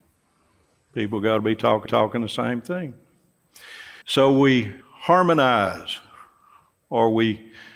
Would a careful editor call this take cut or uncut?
cut